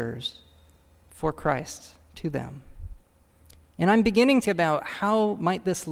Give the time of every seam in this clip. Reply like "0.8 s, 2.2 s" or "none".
3.3 s, 4.4 s